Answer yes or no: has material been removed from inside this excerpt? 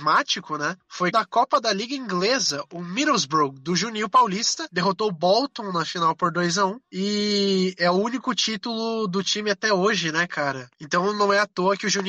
yes